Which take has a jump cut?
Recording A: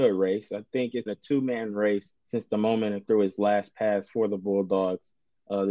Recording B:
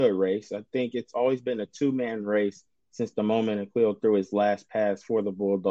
A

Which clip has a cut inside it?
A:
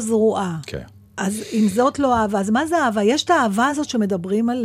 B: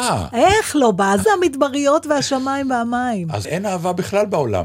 B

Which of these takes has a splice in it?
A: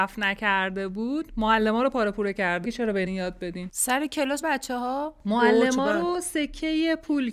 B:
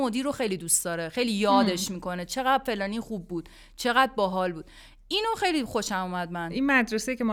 A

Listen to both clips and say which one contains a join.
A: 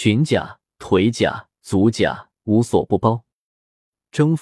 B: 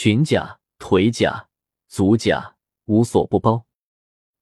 A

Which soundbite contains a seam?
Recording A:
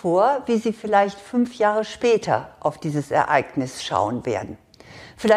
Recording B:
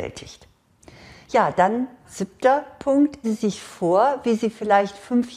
B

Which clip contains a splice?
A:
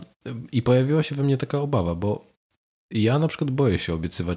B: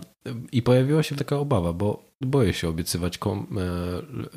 B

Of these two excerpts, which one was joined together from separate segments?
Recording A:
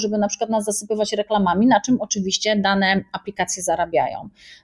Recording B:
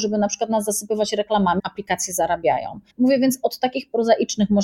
B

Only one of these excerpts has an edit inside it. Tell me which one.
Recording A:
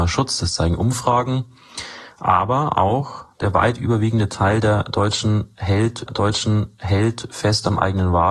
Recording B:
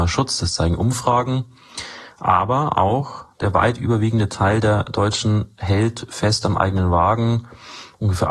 A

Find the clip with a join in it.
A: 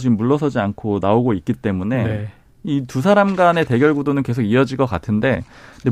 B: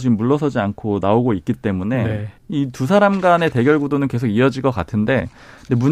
B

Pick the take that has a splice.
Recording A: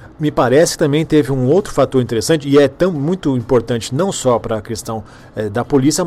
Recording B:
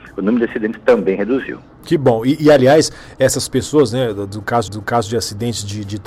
B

